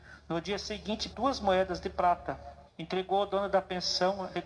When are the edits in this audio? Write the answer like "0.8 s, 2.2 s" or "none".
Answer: 1.1 s, 2.7 s